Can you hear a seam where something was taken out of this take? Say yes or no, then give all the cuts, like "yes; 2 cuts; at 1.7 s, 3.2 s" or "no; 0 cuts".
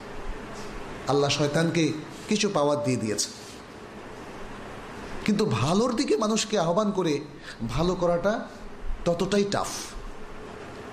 no; 0 cuts